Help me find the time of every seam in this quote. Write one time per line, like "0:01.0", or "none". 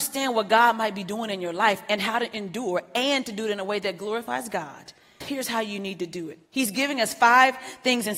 0:05.2
0:06.5